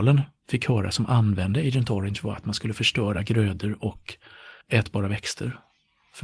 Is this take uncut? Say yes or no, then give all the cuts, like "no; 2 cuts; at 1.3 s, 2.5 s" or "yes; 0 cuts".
no; 1 cut; at 4.6 s